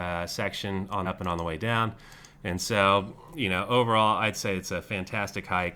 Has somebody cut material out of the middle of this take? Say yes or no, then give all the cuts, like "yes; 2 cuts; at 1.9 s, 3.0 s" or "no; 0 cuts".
yes; 1 cut; at 1.1 s